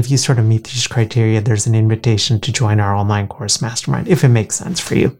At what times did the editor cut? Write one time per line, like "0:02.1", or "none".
none